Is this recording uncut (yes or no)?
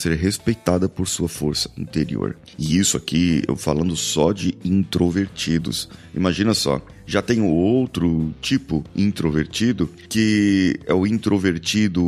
yes